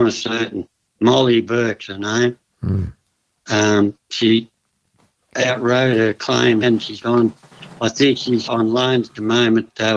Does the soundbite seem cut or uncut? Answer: cut